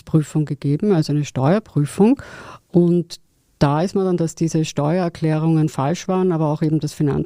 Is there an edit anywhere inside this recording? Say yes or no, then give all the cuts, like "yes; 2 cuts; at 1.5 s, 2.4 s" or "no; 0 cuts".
yes; 1 cut; at 4.2 s